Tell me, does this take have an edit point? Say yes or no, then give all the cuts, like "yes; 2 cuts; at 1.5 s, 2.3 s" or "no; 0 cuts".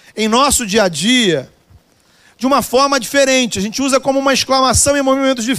no; 0 cuts